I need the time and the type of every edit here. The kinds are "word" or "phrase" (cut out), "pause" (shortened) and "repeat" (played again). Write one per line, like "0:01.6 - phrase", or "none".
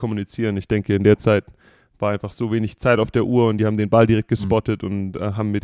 none